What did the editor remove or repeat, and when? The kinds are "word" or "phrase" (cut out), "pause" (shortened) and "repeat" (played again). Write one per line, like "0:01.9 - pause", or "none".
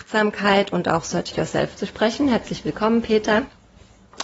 0:01.3 - word